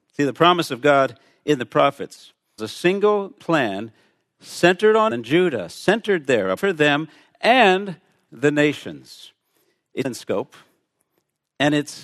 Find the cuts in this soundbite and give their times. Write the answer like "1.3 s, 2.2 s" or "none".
2.6 s, 3.4 s, 5.1 s, 6.6 s, 8.3 s, 10.0 s